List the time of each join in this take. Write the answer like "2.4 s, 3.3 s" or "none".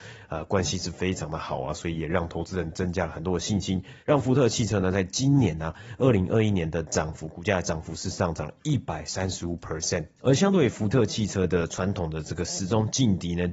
4.0 s